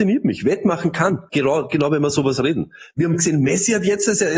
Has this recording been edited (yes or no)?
no